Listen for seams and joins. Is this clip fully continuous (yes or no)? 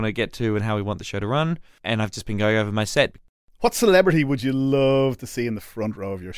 yes